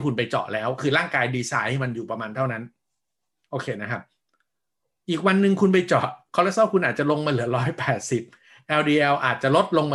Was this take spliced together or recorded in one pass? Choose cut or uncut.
uncut